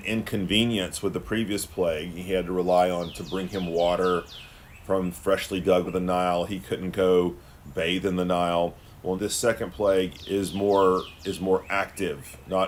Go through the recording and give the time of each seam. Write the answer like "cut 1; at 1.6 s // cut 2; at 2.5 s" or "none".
cut 1; at 3.1 s // cut 2; at 5.9 s // cut 3; at 9.2 s // cut 4; at 10.2 s

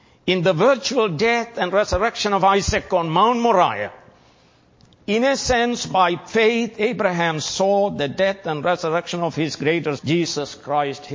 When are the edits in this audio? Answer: cut 1; at 10.0 s

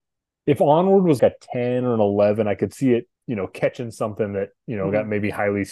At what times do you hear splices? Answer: cut 1; at 1.2 s // cut 2; at 3.2 s

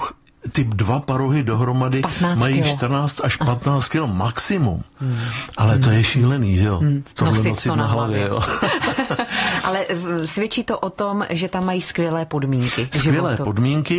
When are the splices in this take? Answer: cut 1; at 4.9 s

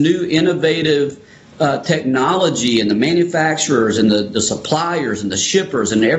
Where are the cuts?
none

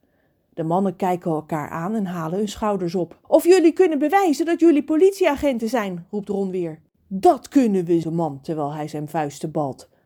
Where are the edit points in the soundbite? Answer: cut 1; at 3.2 s // cut 2; at 8.0 s

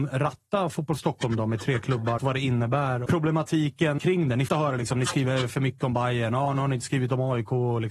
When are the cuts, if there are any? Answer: cut 1; at 2.2 s // cut 2; at 3.1 s // cut 3; at 4.0 s // cut 4; at 4.5 s

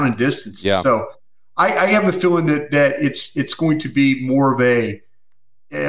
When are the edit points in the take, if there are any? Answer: none

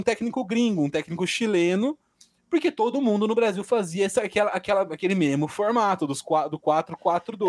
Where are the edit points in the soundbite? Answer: none

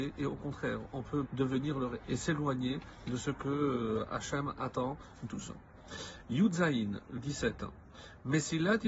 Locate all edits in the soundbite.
cut 1; at 1.3 s // cut 2; at 2.0 s // cut 3; at 5.3 s // cut 4; at 7.2 s

